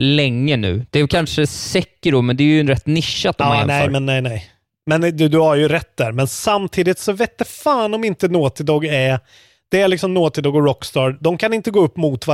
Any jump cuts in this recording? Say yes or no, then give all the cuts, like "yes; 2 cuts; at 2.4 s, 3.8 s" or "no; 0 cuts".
no; 0 cuts